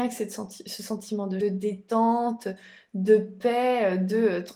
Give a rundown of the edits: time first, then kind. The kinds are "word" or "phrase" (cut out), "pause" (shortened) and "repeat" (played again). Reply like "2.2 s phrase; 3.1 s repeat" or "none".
1.4 s phrase